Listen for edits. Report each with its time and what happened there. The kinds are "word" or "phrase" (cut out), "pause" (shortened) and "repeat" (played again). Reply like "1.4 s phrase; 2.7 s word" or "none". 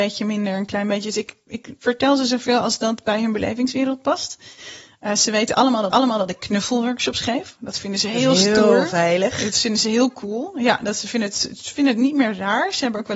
5.9 s repeat